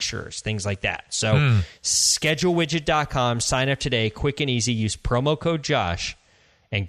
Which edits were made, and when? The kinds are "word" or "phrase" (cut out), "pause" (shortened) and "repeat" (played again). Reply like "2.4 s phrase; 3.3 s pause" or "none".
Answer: none